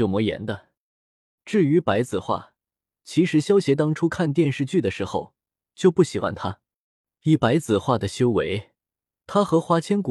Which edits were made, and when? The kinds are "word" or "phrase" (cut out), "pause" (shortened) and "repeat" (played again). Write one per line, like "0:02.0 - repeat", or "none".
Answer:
none